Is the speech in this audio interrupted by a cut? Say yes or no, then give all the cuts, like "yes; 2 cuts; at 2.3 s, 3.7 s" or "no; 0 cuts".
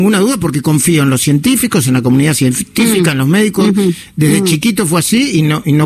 no; 0 cuts